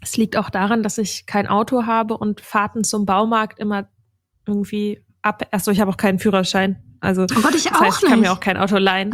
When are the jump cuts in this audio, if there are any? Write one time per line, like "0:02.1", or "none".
none